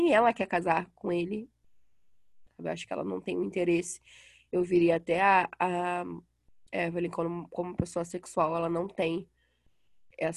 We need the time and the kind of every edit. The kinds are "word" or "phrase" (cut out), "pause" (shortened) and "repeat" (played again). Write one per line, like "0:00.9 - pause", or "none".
none